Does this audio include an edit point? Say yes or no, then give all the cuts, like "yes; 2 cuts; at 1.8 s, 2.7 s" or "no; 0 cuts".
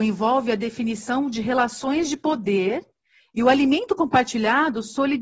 no; 0 cuts